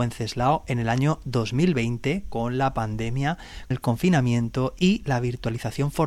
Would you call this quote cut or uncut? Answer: cut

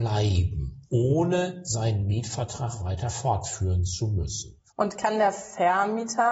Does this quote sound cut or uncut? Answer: cut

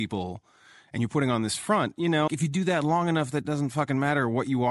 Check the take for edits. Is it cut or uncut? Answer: cut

